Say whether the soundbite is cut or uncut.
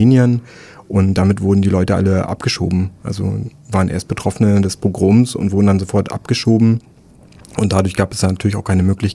uncut